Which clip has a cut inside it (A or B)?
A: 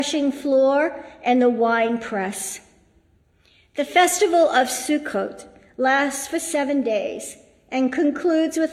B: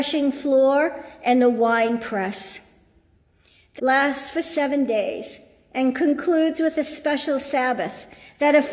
B